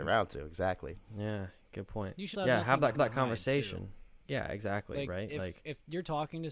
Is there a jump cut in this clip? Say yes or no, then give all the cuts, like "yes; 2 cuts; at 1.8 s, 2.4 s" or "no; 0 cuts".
yes; 4 cuts; at 2.3 s, 2.9 s, 4.2 s, 5.6 s